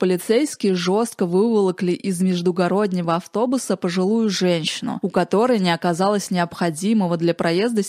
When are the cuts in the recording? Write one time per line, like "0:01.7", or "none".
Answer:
none